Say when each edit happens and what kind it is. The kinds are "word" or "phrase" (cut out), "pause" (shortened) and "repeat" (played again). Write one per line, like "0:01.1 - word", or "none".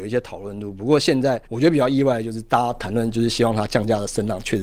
0:01.4 - pause

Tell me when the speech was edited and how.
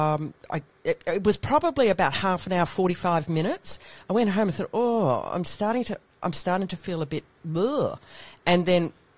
none

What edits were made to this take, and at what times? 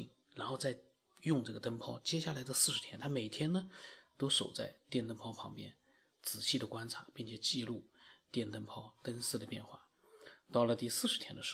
none

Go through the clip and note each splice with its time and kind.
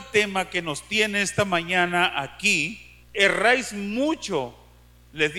0:03.0 - pause

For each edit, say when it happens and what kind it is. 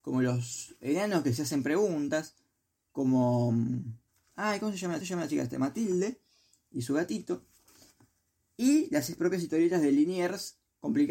0:05.0 - repeat

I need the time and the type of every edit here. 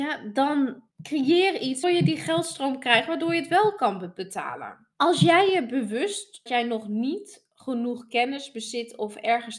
0:00.9 - pause
0:01.8 - word
0:04.9 - pause
0:06.5 - phrase

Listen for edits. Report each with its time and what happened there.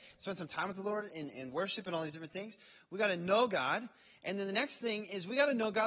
none

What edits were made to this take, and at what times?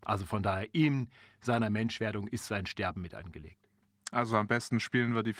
none

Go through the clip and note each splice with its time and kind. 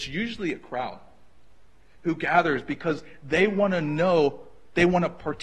none

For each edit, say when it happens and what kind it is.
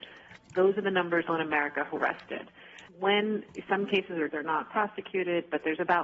0:01.3 - phrase
0:02.0 - word
0:02.9 - pause
0:04.3 - word

